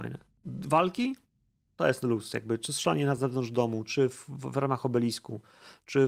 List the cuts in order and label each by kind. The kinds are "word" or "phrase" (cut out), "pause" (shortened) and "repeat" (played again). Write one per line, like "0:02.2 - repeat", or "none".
none